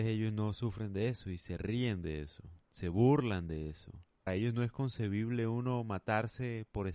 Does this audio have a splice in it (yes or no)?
yes